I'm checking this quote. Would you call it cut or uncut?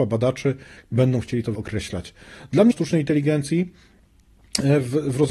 cut